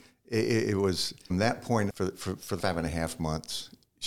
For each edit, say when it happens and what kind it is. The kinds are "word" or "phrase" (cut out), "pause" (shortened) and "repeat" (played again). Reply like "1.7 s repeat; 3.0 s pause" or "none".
1.3 s word; 1.9 s word; 2.6 s word